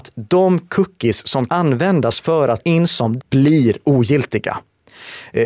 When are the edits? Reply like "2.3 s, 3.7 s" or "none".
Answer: 1.5 s, 2.6 s, 3.2 s